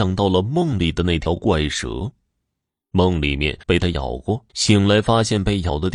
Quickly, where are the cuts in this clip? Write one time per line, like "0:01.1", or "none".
0:03.6
0:04.5